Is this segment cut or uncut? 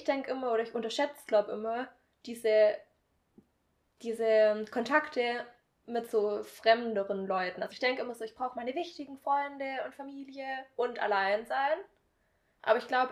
uncut